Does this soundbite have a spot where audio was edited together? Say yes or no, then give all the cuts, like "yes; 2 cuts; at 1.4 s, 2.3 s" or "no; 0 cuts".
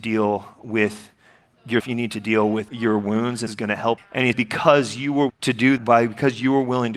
yes; 7 cuts; at 1.8 s, 2.7 s, 3.5 s, 4.0 s, 4.3 s, 5.3 s, 5.8 s